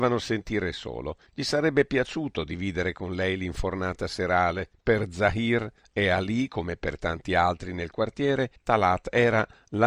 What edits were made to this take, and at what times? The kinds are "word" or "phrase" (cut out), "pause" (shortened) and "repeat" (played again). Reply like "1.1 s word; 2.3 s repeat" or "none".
1.3 s pause; 4.7 s pause; 8.6 s pause